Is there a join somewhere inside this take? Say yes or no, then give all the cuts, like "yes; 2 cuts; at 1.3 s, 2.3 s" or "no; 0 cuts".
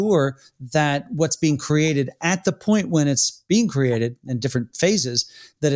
no; 0 cuts